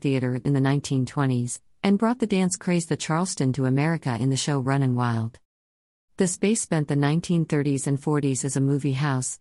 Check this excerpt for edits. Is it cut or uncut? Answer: uncut